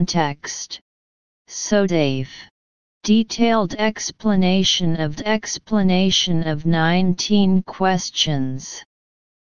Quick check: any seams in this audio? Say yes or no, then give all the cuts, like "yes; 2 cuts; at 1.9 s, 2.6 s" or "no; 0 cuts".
yes; 3 cuts; at 1.9 s, 2.8 s, 5.1 s